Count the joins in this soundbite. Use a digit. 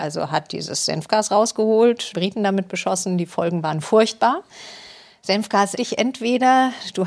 2